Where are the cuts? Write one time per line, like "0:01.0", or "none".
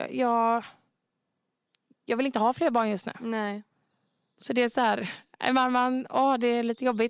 none